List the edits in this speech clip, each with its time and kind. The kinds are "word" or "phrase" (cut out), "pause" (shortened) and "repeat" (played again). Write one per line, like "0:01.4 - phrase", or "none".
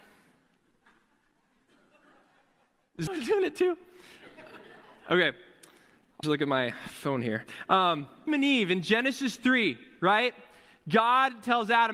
0:03.1 - word
0:06.2 - word
0:08.3 - word